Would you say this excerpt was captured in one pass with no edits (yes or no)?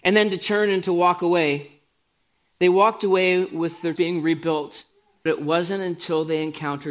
no